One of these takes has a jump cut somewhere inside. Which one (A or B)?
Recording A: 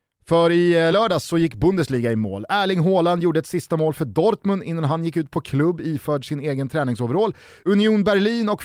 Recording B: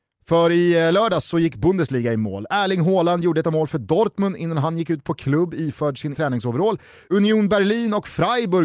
B